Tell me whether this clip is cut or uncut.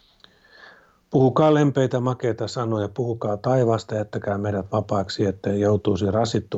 uncut